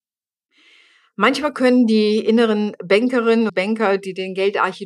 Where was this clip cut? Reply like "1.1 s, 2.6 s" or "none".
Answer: 3.5 s